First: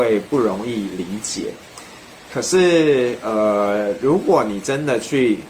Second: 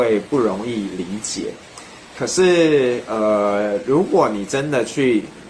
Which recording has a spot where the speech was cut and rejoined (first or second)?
second